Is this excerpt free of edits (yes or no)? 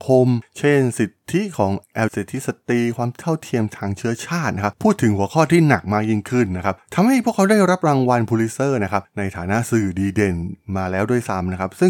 no